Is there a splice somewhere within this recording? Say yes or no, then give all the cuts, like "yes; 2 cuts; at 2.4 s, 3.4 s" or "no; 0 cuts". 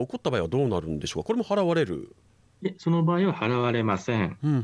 no; 0 cuts